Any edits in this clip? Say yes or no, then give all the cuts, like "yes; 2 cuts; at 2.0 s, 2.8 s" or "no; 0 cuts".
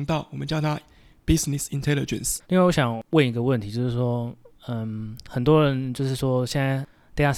yes; 2 cuts; at 2.4 s, 4.5 s